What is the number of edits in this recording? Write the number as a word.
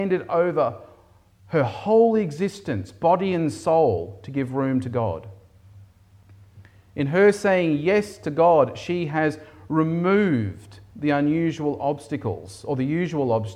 zero